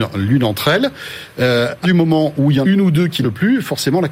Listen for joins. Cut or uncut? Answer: cut